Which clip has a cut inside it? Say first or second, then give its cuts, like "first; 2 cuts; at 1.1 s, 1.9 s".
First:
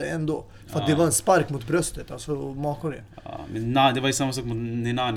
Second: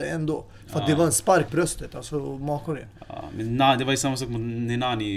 second; 1 cut; at 1.5 s